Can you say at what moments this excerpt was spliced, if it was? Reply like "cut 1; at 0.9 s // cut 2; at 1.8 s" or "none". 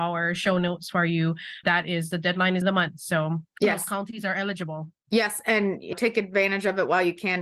cut 1; at 1.6 s // cut 2; at 2.6 s // cut 3; at 3.5 s // cut 4; at 5.0 s // cut 5; at 5.9 s